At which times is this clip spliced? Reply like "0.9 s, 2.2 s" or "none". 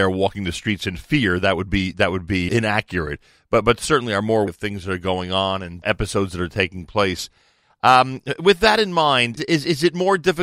2.5 s, 4.5 s, 5.8 s, 9.4 s